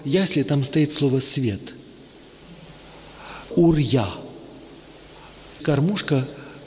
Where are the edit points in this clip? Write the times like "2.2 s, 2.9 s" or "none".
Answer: 3.5 s, 5.6 s

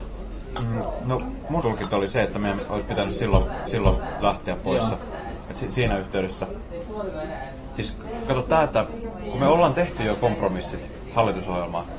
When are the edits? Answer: 1.6 s, 3.7 s

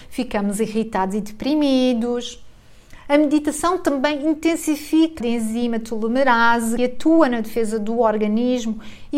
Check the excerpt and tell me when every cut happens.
5.2 s, 6.8 s

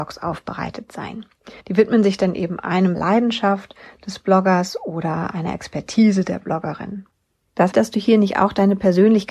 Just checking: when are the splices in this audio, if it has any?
1.6 s, 2.9 s, 7.7 s

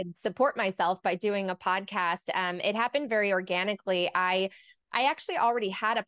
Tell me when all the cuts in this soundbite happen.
none

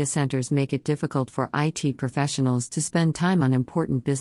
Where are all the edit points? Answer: none

